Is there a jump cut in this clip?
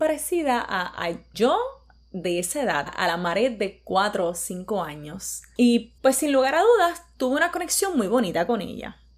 yes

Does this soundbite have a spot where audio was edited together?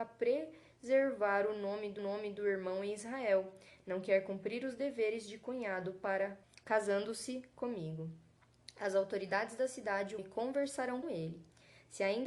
yes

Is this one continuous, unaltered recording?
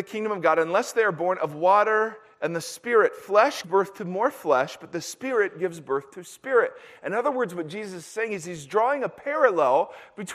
no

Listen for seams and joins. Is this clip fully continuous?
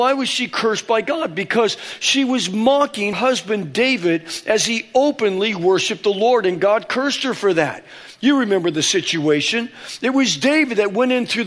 no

